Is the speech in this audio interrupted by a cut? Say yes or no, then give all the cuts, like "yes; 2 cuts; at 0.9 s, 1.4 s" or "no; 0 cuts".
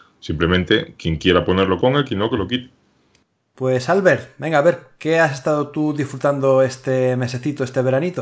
yes; 1 cut; at 1.8 s